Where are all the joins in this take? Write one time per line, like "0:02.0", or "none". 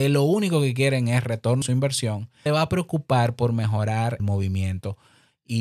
0:01.6
0:02.5
0:04.2